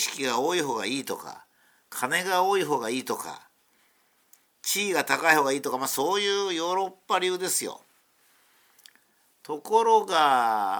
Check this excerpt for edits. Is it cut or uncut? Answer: uncut